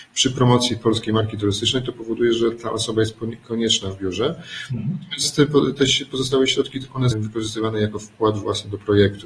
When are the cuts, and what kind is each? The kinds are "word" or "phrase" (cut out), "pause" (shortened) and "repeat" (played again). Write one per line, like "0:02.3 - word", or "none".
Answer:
0:07.1 - word